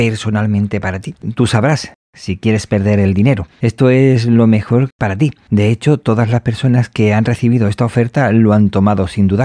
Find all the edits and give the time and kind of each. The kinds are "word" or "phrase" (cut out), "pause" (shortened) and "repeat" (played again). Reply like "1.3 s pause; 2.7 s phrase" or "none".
none